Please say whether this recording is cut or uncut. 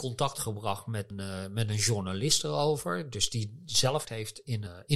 cut